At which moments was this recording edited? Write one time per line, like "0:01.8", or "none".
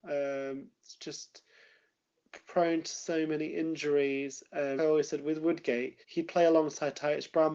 0:04.8
0:06.0